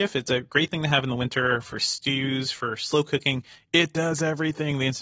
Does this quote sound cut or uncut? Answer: uncut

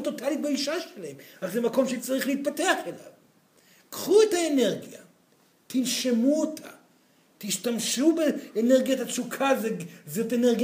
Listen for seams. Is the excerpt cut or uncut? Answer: uncut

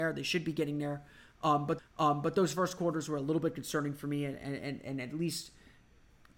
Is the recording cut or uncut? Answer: cut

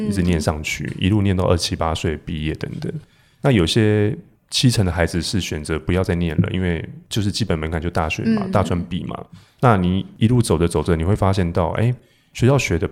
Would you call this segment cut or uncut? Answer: uncut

